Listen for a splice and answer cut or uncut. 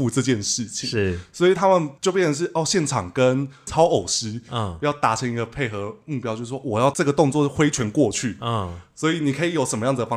cut